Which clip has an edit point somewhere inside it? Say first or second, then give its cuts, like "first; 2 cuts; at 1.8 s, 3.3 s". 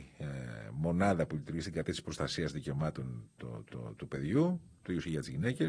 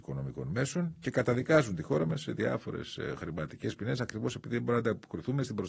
first; 1 cut; at 3.7 s